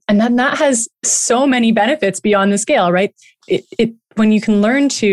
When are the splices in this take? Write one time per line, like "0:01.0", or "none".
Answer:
none